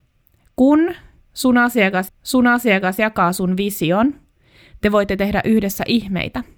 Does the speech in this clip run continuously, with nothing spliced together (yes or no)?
no